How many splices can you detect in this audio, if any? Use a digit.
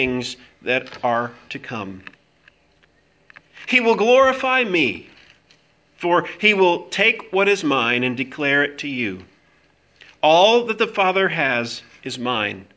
0